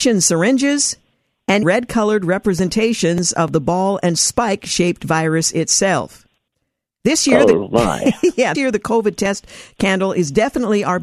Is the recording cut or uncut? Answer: cut